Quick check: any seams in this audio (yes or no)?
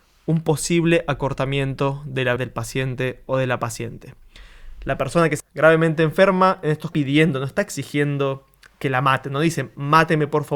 yes